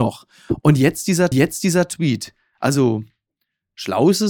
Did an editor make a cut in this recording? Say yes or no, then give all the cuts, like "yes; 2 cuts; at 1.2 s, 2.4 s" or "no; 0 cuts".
yes; 1 cut; at 1.3 s